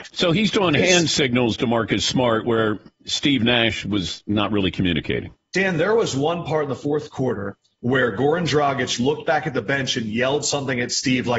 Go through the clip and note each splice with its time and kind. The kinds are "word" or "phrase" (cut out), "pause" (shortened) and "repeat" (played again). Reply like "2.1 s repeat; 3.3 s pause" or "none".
none